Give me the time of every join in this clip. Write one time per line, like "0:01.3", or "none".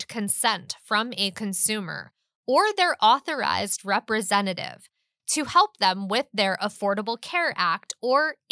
none